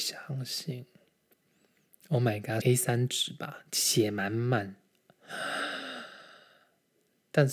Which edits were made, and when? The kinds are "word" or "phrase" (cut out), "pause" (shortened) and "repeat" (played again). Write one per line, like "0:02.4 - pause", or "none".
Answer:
0:02.6 - phrase